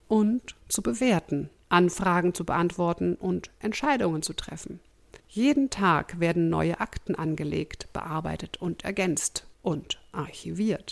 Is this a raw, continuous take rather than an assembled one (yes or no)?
no